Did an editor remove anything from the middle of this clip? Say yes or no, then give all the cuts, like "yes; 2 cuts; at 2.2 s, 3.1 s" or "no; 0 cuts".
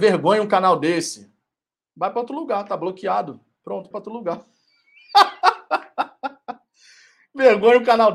yes; 2 cuts; at 1.7 s, 3.9 s